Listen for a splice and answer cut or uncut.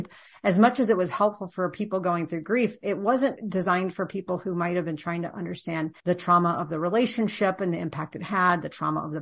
cut